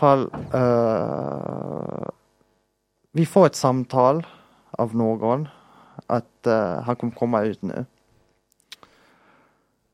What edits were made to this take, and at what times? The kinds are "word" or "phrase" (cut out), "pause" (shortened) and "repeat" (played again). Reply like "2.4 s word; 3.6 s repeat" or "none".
none